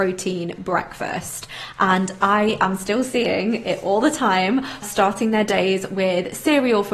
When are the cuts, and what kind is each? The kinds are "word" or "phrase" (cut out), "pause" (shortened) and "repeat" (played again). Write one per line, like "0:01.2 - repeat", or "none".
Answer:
0:04.8 - phrase